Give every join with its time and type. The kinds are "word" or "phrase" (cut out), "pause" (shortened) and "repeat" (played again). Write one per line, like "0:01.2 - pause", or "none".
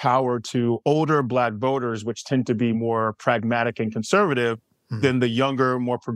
none